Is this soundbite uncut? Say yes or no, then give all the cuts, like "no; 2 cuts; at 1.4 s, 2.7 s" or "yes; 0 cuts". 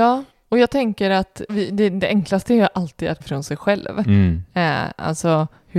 no; 2 cuts; at 1.5 s, 3.2 s